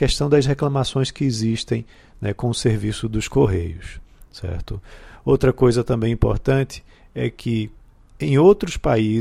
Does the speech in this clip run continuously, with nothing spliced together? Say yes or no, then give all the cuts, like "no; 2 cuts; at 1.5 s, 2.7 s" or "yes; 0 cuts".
yes; 0 cuts